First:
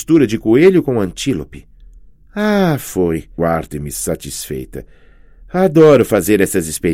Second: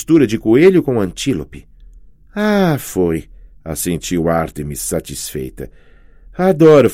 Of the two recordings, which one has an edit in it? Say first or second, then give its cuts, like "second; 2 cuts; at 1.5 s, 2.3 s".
first; 1 cut; at 3.4 s